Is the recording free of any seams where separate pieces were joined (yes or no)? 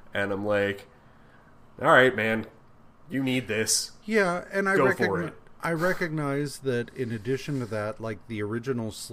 yes